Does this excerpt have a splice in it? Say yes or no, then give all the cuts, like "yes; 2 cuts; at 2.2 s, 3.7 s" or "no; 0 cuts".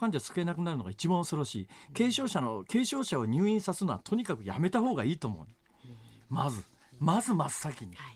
no; 0 cuts